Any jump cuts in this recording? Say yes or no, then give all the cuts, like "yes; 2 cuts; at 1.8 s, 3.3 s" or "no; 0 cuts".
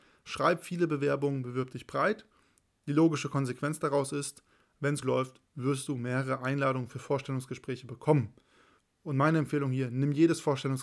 yes; 1 cut; at 5.0 s